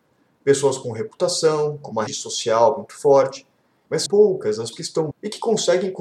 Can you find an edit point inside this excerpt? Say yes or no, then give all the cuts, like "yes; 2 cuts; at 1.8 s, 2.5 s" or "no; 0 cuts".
yes; 4 cuts; at 2.1 s, 4.1 s, 4.7 s, 5.1 s